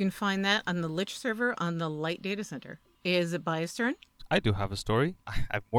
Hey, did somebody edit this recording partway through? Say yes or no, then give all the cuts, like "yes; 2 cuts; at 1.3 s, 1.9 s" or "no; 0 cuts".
no; 0 cuts